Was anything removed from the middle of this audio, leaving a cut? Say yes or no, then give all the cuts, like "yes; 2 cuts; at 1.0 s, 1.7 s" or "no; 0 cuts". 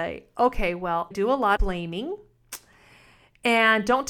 yes; 2 cuts; at 1.1 s, 1.6 s